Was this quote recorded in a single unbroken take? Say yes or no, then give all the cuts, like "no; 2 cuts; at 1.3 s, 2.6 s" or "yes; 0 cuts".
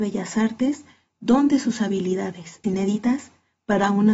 no; 1 cut; at 2.6 s